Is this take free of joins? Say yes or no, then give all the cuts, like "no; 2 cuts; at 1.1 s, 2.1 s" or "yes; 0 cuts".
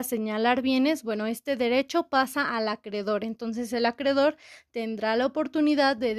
yes; 0 cuts